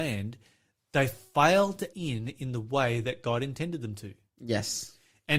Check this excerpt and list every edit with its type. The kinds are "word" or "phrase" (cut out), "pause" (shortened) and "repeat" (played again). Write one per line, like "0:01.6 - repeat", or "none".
0:01.9 - word